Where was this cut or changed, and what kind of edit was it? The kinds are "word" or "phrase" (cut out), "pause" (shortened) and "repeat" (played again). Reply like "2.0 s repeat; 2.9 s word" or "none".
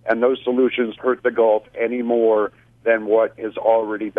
1.0 s word